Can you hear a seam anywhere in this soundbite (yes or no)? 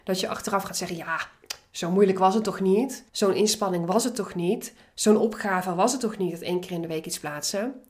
yes